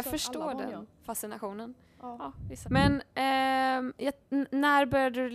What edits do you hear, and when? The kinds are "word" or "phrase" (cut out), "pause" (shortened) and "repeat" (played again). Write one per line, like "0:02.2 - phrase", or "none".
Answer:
0:02.6 - word